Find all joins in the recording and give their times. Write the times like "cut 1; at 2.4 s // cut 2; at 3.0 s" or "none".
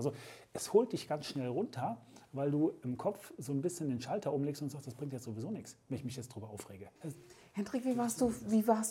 cut 1; at 7.0 s